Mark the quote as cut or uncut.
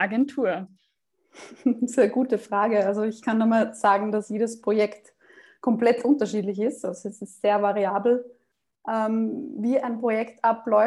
uncut